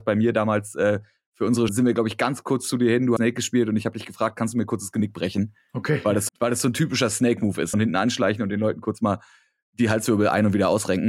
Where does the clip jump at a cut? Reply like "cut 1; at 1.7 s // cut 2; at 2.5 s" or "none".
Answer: cut 1; at 1.7 s // cut 2; at 3.2 s // cut 3; at 6.3 s // cut 4; at 7.7 s